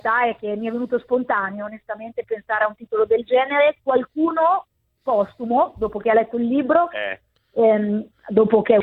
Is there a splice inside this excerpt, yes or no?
no